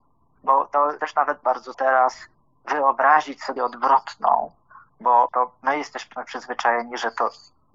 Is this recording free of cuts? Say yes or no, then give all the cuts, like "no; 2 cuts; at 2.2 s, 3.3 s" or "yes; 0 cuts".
no; 5 cuts; at 1.0 s, 1.4 s, 1.7 s, 3.6 s, 5.3 s